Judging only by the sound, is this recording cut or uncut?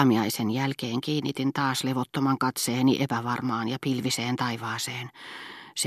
uncut